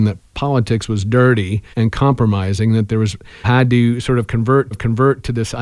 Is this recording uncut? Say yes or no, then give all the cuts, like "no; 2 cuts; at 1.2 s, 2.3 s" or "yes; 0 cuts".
no; 3 cuts; at 1.7 s, 3.4 s, 4.7 s